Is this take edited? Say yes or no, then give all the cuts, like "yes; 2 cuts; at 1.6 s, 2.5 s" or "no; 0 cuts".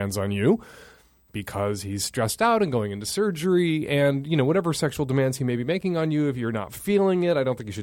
no; 0 cuts